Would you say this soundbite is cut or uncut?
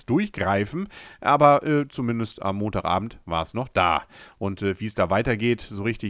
uncut